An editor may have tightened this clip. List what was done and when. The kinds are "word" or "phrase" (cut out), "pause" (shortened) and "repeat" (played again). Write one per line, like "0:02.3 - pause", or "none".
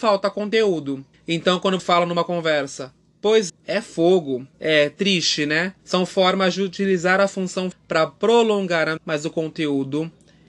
0:01.1 - pause
0:01.8 - word
0:03.5 - word
0:04.5 - pause
0:05.8 - pause
0:07.7 - word
0:09.0 - word